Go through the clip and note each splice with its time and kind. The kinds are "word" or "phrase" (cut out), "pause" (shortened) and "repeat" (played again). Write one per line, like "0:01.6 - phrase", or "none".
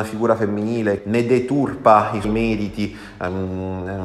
0:01.0 - word
0:02.2 - word